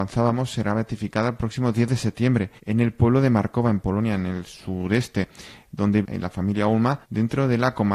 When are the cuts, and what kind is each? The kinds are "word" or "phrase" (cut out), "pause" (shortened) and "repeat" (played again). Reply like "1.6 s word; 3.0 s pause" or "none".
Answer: 2.6 s pause; 6.0 s word; 7.0 s pause